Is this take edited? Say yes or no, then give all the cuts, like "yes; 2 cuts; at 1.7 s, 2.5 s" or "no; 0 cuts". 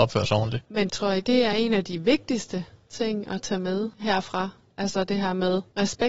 no; 0 cuts